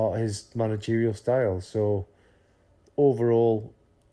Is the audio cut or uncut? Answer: cut